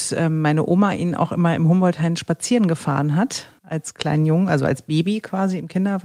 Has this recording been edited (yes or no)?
no